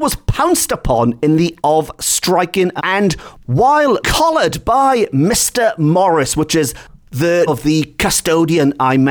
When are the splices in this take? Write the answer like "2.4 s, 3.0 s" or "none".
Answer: 1.6 s, 2.8 s, 4.0 s, 7.5 s

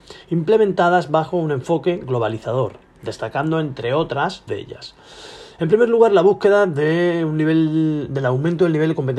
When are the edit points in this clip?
4.5 s

